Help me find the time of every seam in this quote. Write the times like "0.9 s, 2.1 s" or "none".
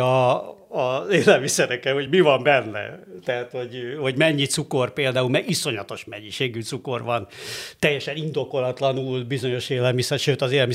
none